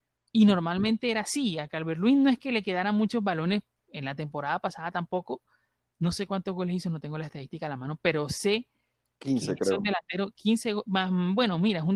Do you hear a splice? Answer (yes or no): no